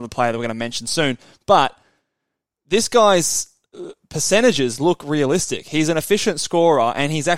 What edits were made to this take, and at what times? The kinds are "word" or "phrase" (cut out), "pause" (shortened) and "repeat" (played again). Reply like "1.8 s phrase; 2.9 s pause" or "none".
none